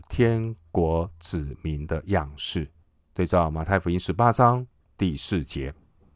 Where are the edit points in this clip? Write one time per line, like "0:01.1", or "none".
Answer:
0:02.8